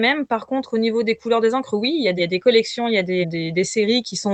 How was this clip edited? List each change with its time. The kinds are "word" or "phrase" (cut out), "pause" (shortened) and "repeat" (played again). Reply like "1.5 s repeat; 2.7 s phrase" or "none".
2.2 s word; 3.2 s word